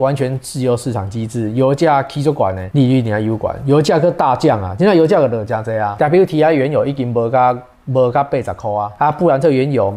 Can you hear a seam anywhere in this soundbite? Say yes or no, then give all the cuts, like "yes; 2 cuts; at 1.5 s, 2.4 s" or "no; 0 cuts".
no; 0 cuts